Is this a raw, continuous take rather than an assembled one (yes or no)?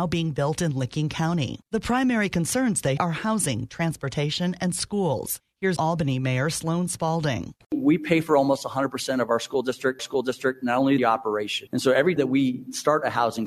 no